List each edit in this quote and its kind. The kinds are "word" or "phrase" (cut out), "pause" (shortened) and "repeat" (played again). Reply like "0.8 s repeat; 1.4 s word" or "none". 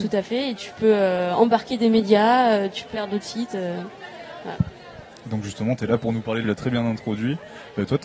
2.9 s word; 6.4 s phrase